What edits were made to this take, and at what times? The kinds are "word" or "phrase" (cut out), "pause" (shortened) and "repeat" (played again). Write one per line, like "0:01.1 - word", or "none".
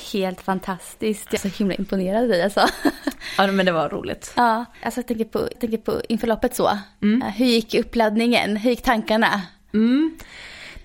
0:01.4 - word
0:04.7 - pause
0:05.5 - repeat